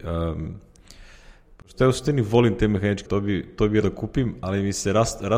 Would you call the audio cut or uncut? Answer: cut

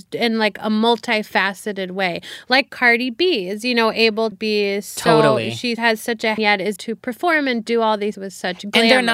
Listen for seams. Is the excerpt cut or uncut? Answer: cut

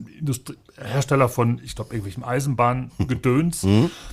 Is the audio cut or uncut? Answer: uncut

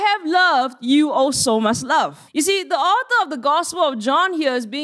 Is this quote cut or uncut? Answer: cut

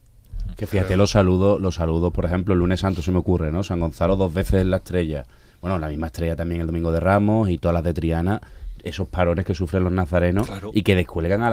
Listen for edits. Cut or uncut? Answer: uncut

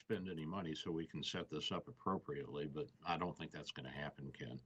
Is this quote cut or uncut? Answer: uncut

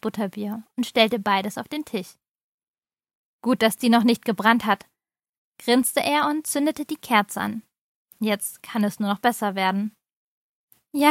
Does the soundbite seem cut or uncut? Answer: uncut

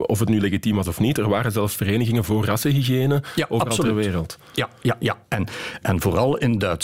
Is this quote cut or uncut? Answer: cut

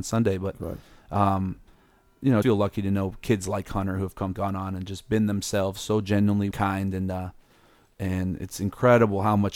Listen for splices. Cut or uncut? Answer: cut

